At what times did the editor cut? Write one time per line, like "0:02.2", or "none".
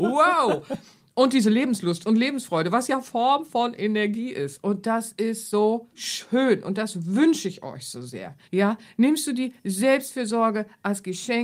0:05.9
0:08.4